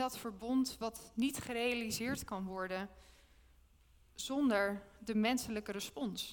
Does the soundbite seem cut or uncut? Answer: uncut